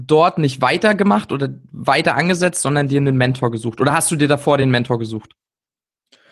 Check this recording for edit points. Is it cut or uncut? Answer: uncut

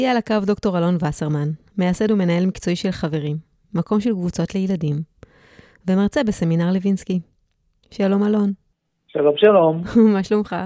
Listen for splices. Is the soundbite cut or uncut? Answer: uncut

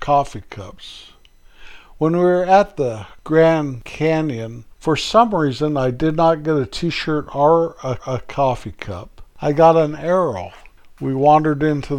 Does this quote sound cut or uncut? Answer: cut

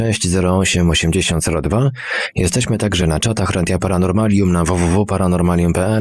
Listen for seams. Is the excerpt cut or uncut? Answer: uncut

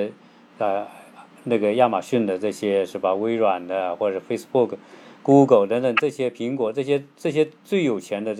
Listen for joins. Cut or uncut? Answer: uncut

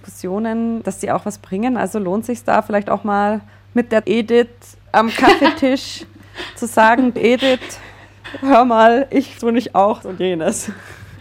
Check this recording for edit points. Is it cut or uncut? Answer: cut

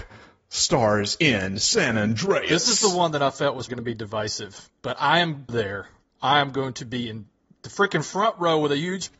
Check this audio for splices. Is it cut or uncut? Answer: cut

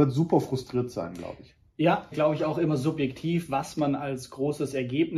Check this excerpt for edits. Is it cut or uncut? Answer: cut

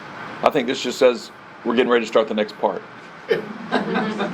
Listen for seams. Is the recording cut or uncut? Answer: uncut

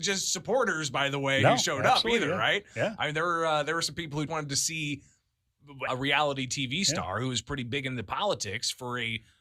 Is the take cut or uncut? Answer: cut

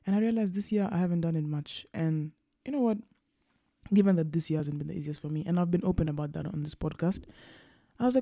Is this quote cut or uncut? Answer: uncut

